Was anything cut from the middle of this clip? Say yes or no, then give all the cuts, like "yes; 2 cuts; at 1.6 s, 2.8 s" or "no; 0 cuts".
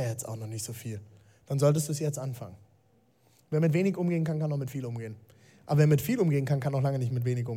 no; 0 cuts